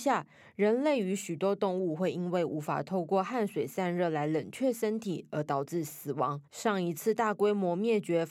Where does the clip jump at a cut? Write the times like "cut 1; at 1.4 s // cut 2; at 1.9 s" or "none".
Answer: cut 1; at 6.5 s